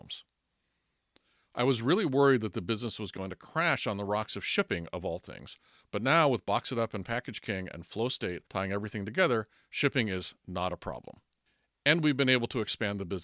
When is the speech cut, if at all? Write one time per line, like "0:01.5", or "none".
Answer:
0:08.5